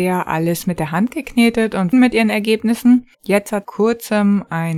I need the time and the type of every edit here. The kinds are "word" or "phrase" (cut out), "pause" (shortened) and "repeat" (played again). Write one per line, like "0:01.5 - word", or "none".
0:01.9 - phrase
0:03.1 - pause
0:03.6 - phrase